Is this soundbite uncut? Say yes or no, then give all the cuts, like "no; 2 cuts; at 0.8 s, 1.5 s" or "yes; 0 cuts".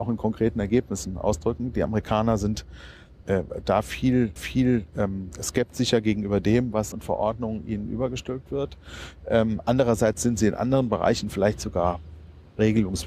no; 3 cuts; at 3.2 s, 4.4 s, 6.9 s